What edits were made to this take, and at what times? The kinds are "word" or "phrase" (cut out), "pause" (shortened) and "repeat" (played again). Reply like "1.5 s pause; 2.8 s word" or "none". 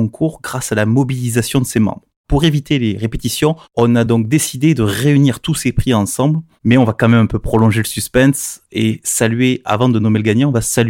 none